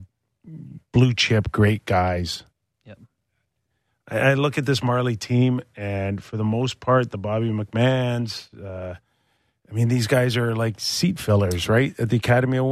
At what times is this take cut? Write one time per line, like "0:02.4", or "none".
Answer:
none